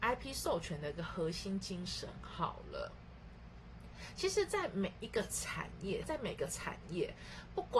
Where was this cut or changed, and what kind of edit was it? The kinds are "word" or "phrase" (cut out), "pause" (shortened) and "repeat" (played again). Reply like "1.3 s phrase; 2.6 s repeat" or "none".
6.0 s word